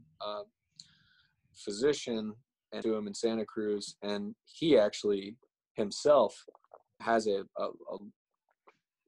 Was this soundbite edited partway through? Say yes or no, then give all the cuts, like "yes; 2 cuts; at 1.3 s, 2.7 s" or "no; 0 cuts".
yes; 2 cuts; at 2.8 s, 7.0 s